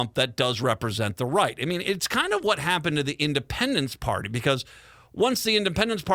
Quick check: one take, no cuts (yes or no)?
yes